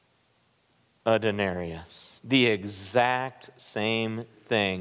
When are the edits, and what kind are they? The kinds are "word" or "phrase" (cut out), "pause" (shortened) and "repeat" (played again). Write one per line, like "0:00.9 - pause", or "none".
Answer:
0:02.2 - pause